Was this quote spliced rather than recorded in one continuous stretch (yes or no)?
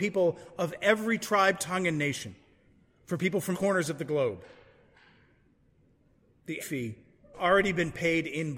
yes